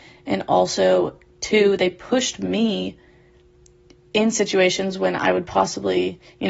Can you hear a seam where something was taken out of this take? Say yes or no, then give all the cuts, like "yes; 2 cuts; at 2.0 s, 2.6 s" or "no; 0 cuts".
no; 0 cuts